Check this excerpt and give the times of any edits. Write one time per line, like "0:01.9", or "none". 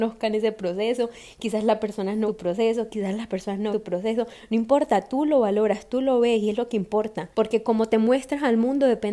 0:02.3
0:03.7
0:07.3